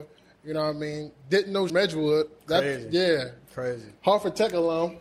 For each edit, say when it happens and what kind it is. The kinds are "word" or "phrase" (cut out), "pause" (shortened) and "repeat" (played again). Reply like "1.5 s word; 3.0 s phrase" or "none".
1.7 s phrase; 2.4 s pause